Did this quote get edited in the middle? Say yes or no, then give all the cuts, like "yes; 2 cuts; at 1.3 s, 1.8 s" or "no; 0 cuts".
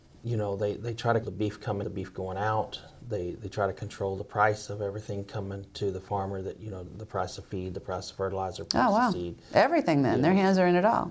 yes; 3 cuts; at 1.2 s, 1.8 s, 6.9 s